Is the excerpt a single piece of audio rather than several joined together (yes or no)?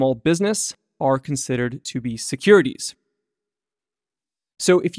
yes